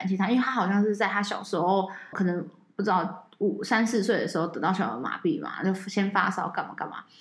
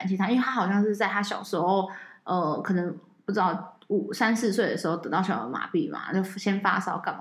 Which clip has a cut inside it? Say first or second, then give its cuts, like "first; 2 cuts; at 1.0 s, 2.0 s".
first; 1 cut; at 2.1 s